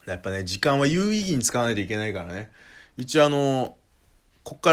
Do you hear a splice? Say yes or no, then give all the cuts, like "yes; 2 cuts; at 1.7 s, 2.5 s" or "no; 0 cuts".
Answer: no; 0 cuts